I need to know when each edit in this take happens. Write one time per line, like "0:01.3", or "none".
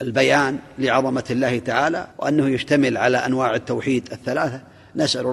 0:02.1